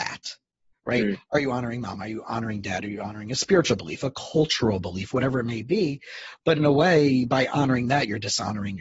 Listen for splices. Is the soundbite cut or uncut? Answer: uncut